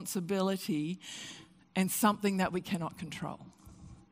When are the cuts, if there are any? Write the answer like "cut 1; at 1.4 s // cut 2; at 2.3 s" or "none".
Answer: cut 1; at 1.6 s